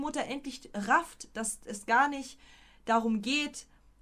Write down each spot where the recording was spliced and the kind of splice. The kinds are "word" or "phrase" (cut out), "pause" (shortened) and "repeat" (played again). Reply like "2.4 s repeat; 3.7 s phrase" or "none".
none